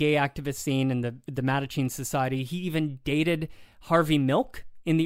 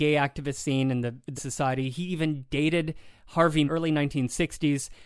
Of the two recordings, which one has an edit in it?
second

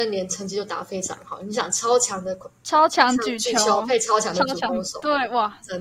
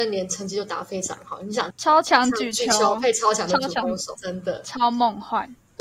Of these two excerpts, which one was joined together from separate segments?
second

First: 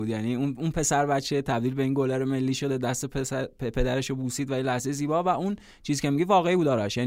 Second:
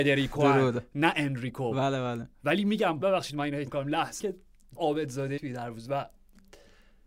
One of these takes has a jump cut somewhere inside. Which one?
second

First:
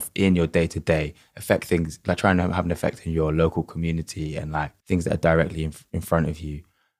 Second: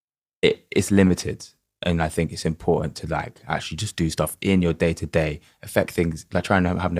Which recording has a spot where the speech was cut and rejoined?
first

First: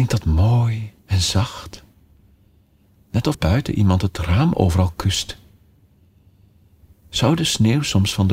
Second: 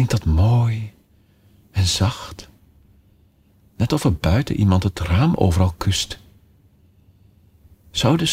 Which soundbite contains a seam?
first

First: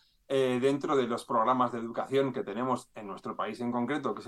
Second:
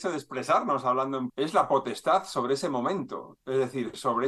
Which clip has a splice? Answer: second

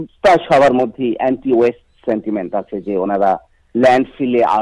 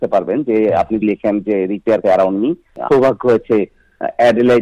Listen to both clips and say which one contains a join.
second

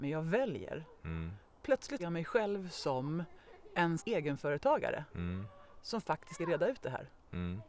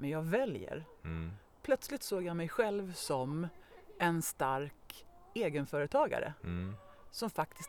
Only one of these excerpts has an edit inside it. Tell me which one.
first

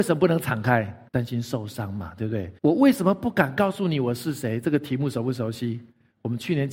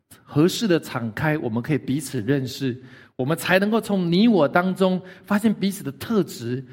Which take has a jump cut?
first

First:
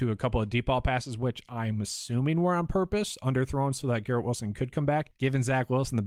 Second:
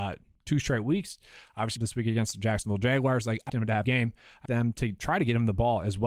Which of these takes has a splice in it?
second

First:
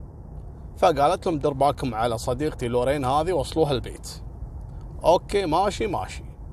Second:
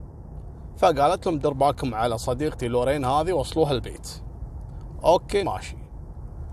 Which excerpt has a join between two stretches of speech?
second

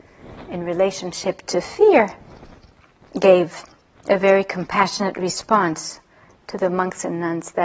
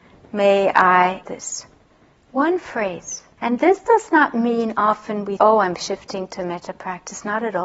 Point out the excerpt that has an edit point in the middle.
second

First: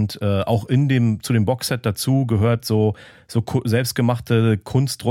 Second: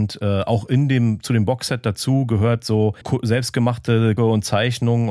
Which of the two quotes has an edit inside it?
second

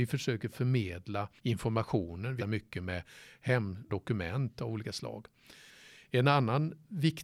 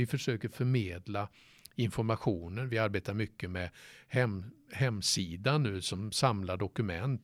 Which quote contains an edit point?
first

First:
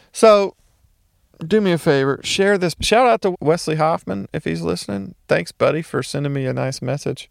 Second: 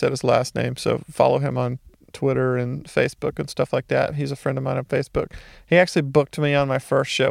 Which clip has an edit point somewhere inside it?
first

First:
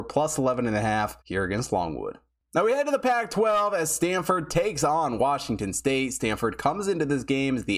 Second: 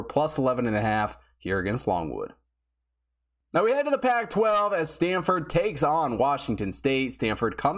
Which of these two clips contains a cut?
first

